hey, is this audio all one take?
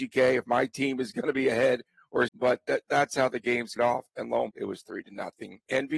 no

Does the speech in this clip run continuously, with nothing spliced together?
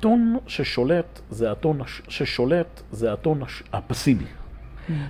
no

